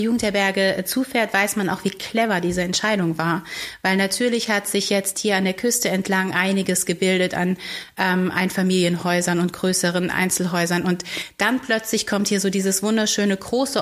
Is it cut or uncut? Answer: uncut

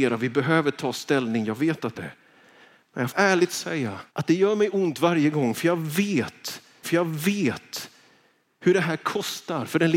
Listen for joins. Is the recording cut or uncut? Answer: cut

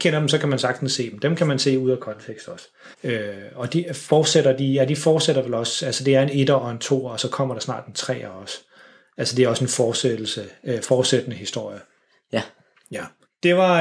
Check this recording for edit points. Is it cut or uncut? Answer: cut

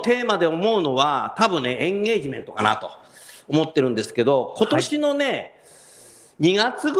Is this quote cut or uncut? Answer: uncut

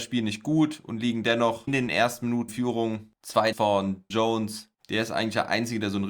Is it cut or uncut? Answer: cut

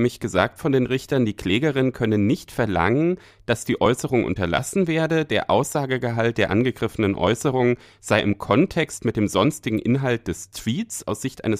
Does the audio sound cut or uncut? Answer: uncut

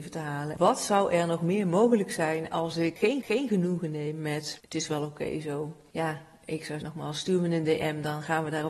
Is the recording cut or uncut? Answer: cut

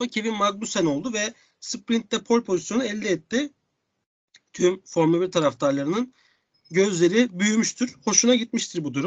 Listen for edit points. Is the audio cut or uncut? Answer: uncut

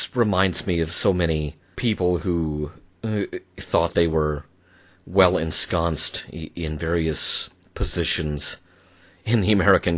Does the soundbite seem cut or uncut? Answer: uncut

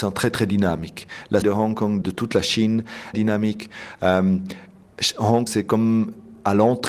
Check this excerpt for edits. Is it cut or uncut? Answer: cut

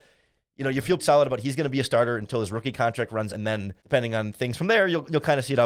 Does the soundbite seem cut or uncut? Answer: cut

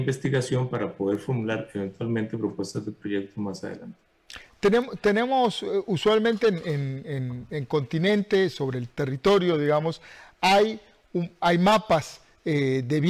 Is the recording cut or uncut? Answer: uncut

